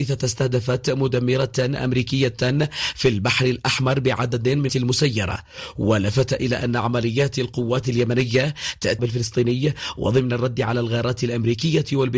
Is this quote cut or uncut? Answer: cut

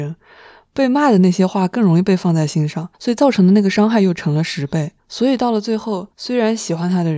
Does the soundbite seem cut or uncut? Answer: cut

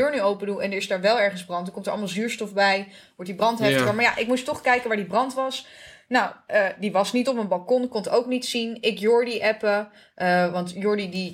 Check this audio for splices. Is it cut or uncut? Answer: uncut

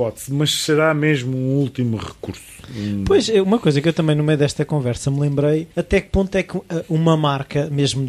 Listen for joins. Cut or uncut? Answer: cut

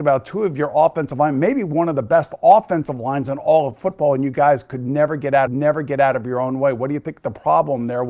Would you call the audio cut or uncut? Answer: cut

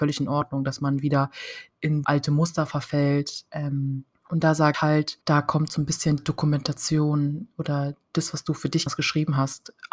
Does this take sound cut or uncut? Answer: cut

